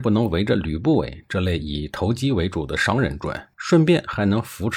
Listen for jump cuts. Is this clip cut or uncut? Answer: cut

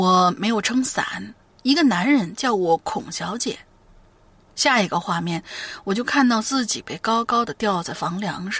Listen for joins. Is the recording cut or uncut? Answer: uncut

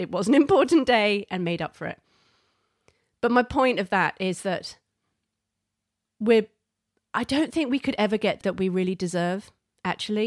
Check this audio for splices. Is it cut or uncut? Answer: cut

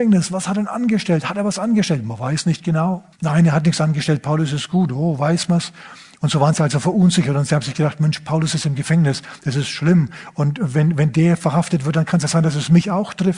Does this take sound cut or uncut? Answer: cut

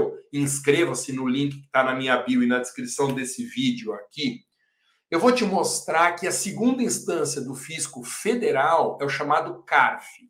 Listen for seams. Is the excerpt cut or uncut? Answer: uncut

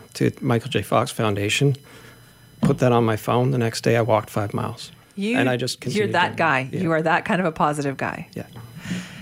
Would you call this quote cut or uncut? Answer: uncut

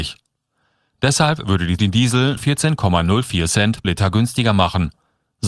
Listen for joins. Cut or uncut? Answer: cut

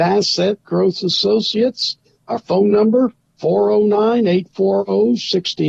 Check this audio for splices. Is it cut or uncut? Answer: uncut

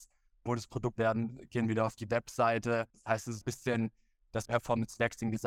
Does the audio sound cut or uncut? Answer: cut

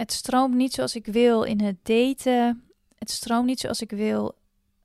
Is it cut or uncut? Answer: uncut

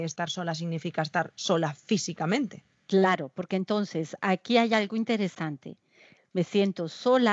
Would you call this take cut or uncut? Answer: uncut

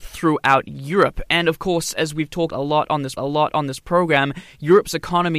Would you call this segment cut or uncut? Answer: cut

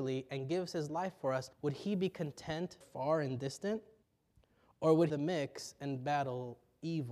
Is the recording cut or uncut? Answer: cut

